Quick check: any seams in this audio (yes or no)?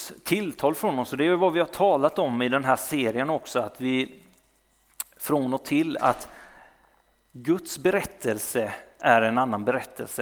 no